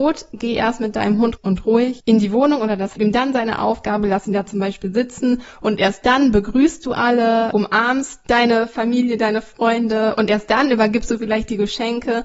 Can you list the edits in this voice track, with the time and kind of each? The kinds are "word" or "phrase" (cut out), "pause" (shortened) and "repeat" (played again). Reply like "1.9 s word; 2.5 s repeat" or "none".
1.4 s word; 3.0 s phrase